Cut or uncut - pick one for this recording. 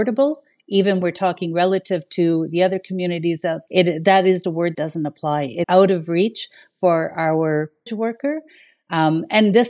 cut